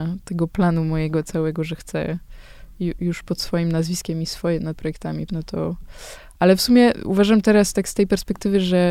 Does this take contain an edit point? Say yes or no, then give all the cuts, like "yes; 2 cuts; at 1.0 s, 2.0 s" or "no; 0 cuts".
yes; 3 cuts; at 3.0 s, 4.7 s, 5.3 s